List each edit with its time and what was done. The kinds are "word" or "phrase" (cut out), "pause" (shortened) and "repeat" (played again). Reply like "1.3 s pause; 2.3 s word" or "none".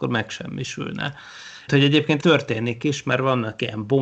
1.7 s word; 2.2 s word